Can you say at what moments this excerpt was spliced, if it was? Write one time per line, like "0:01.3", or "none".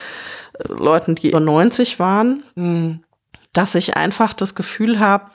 0:01.3